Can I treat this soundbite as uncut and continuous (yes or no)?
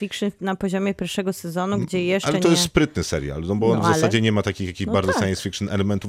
yes